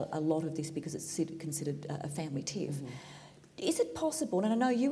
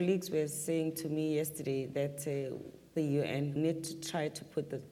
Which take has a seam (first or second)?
second